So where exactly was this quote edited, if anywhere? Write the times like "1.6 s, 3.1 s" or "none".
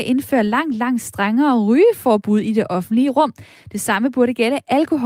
none